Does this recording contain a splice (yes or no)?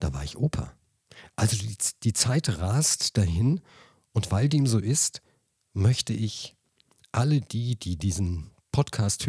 no